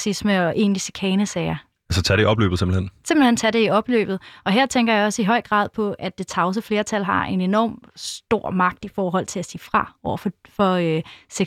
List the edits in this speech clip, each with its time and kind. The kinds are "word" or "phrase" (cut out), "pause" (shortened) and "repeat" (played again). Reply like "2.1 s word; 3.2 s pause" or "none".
none